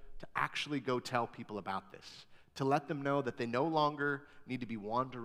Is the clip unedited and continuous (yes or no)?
yes